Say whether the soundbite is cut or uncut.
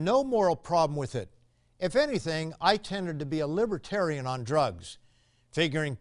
uncut